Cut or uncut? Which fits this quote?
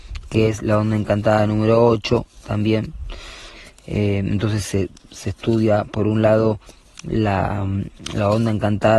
uncut